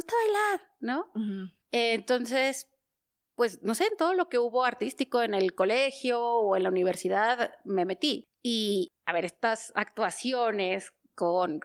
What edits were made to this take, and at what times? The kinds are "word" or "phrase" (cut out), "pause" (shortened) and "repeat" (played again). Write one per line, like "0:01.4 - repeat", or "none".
0:01.6 - pause